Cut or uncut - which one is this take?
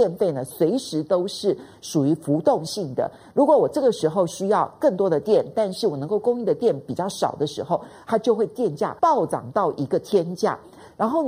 cut